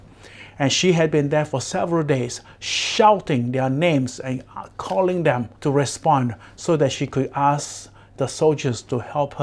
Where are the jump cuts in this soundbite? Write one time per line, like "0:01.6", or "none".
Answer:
0:05.6